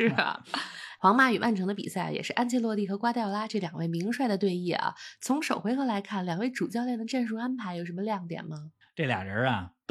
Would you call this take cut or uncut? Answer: uncut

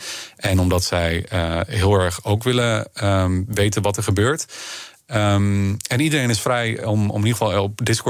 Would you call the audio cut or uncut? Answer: uncut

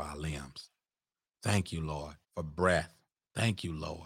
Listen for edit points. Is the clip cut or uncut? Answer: cut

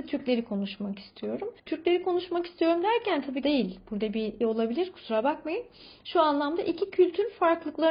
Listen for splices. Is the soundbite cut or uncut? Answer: cut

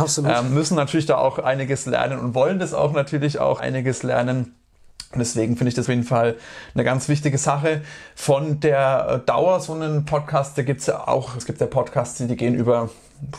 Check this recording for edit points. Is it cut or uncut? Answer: cut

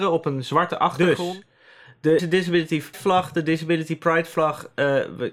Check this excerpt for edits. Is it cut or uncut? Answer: cut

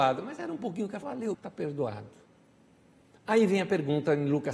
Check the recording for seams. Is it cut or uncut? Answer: cut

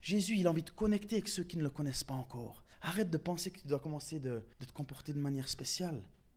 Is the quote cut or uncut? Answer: cut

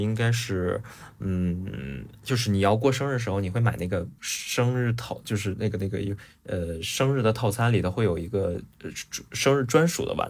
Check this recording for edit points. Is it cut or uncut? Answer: cut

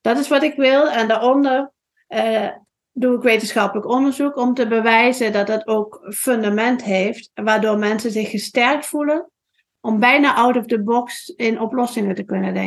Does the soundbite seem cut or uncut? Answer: uncut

